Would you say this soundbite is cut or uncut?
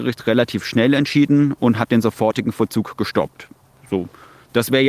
uncut